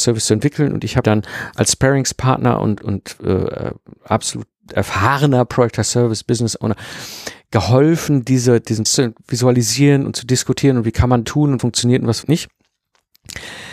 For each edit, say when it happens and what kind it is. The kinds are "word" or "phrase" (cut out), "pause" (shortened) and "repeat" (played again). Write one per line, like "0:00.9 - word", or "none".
0:01.0 - word
0:02.8 - word
0:08.9 - word
0:11.2 - word
0:11.6 - word
0:12.2 - word